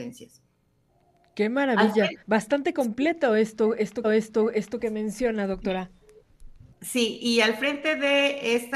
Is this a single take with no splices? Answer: no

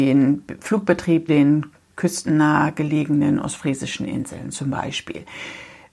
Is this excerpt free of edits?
no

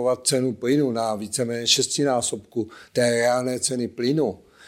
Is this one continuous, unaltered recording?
yes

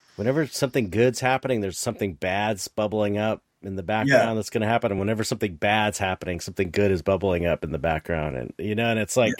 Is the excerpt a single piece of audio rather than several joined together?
yes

